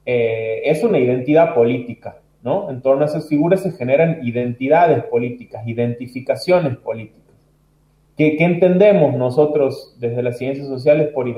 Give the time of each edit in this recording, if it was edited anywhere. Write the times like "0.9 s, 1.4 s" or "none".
none

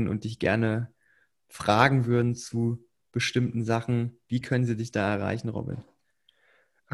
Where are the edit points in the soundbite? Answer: none

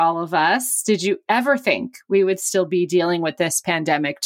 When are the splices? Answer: none

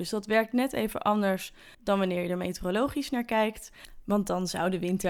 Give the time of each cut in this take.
1.7 s

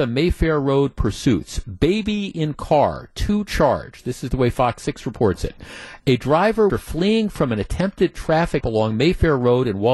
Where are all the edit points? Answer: 6.7 s, 8.6 s

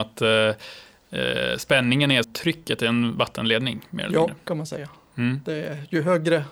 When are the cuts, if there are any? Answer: 2.2 s

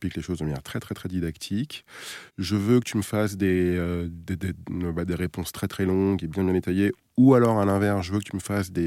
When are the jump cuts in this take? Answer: 2.3 s

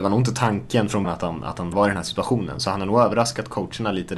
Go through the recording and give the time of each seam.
1.0 s, 1.7 s

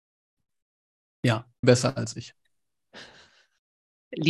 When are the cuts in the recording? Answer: 1.6 s

